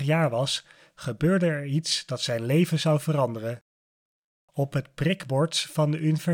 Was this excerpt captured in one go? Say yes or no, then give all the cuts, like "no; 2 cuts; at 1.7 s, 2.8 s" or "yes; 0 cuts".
yes; 0 cuts